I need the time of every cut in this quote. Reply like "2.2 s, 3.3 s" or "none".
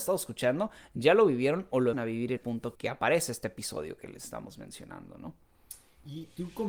1.9 s, 2.4 s, 2.7 s

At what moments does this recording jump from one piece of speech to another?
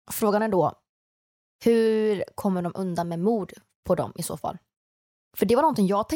none

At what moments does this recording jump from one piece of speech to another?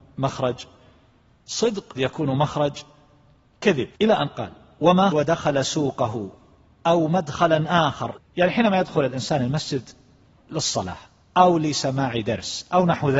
2.0 s, 3.9 s, 5.1 s, 8.2 s

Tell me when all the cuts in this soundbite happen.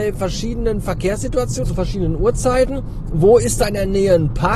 1.6 s

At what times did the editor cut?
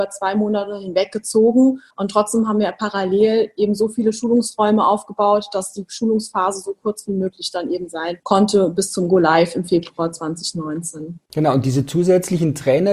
1.9 s, 11.2 s

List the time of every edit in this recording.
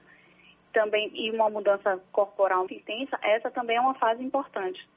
2.7 s

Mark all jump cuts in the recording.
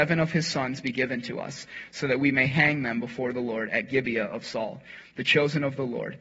none

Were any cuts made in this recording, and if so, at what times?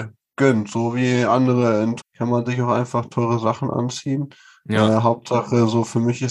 2.0 s

